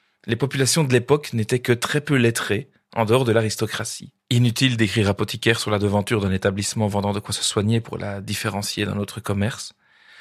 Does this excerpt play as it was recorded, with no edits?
no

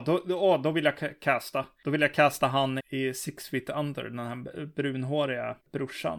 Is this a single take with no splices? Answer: no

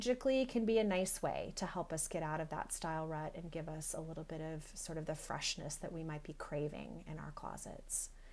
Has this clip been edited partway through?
no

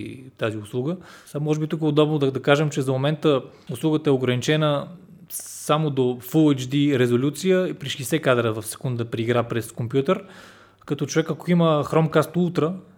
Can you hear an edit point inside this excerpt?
no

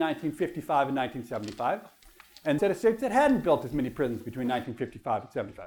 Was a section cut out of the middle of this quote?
yes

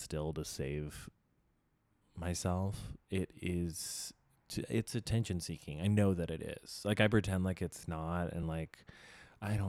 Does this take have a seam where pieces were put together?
no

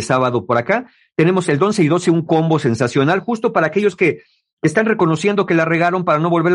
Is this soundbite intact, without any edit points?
yes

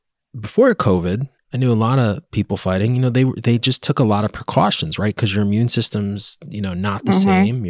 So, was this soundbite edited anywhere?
yes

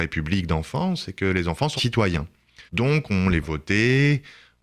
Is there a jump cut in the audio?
yes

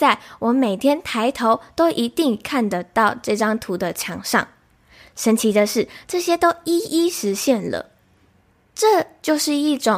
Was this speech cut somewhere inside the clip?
no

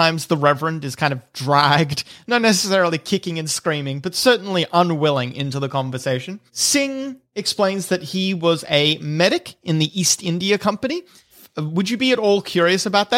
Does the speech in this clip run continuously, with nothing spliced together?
no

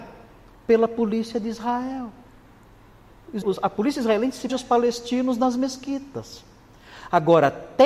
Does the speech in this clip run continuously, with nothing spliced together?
no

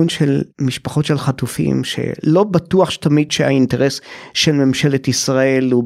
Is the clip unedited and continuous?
yes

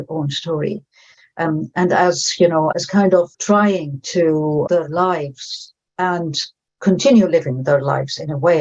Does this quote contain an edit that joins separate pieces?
yes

